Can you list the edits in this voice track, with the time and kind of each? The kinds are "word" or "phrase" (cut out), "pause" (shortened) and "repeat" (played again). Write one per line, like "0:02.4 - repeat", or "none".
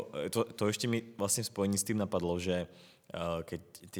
none